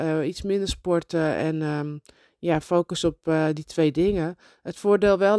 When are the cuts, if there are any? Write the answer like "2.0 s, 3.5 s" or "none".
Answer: none

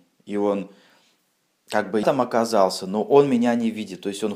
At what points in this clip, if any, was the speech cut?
2.0 s

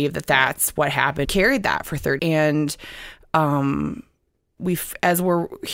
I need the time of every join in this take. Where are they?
1.2 s, 2.2 s, 4.6 s

